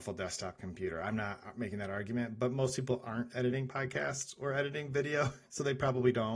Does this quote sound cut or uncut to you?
uncut